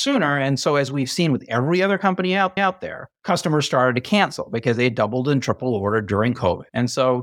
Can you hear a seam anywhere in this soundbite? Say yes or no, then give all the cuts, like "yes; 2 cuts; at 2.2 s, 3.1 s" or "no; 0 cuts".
yes; 1 cut; at 2.6 s